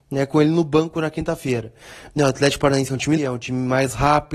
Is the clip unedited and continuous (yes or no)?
no